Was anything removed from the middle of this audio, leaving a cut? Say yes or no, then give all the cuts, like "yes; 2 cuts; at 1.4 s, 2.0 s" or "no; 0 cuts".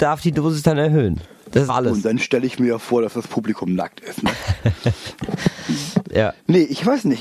yes; 1 cut; at 1.7 s